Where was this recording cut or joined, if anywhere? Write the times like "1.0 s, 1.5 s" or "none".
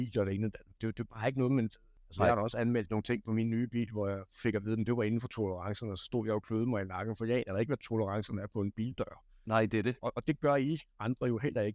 10.0 s